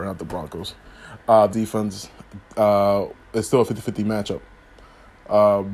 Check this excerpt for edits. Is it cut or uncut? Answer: cut